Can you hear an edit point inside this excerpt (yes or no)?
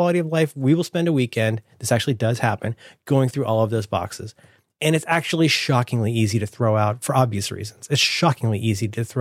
no